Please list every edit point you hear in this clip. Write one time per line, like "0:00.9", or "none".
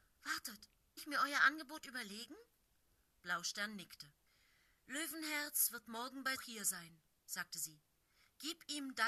0:01.0
0:06.3

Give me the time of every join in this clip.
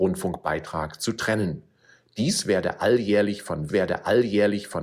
0:03.7

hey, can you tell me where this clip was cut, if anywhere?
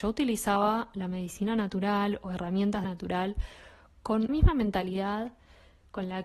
0:02.8
0:04.3

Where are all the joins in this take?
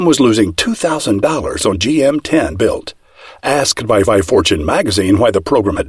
0:01.7
0:02.5
0:04.0

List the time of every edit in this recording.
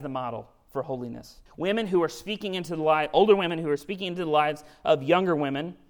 0:01.5

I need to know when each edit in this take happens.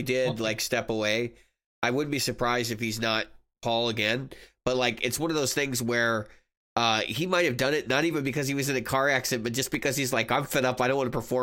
none

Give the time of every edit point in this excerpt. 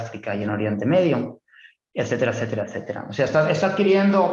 none

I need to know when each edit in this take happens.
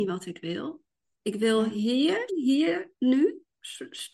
0:02.3

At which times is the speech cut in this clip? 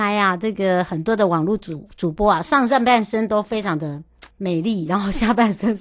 0:04.3

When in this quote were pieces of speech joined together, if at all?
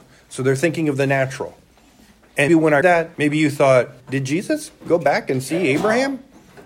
0:02.5
0:02.8
0:03.1
0:04.0

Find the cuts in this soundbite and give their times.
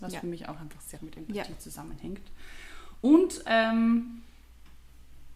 0:01.0

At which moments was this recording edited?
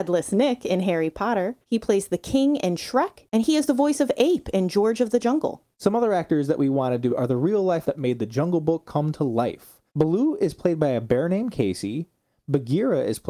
0:01.6
0:05.7
0:07.1
0:07.8
0:09.9

